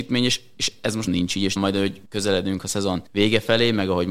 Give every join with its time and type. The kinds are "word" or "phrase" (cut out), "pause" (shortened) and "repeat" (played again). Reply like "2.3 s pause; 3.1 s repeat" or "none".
1.1 s word; 1.6 s word; 2.1 s pause; 3.1 s pause